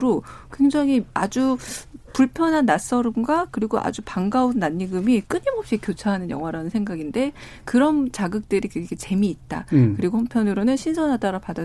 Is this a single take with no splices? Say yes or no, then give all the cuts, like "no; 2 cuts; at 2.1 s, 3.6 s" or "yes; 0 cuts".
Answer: yes; 0 cuts